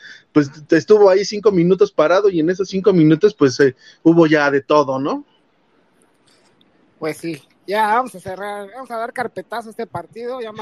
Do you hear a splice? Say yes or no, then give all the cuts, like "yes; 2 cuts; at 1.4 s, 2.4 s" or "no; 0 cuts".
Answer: no; 0 cuts